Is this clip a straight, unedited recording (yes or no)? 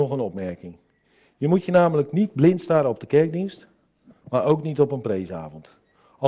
yes